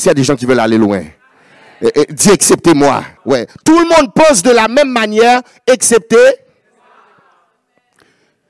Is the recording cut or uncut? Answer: cut